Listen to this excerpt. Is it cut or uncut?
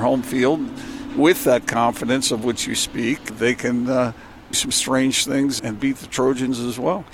cut